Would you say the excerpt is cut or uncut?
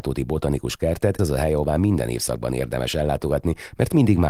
cut